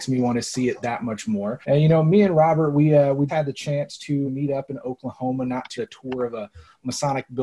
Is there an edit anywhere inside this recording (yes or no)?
yes